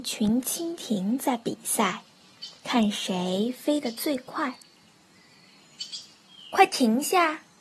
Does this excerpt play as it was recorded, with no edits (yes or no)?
no